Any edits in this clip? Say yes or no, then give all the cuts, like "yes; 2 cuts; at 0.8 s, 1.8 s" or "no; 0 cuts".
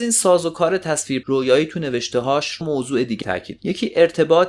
yes; 4 cuts; at 1.2 s, 2.6 s, 3.2 s, 3.6 s